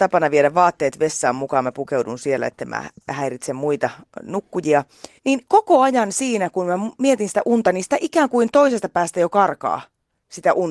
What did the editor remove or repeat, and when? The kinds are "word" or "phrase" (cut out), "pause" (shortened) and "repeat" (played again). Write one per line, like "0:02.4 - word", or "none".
0:05.2 - pause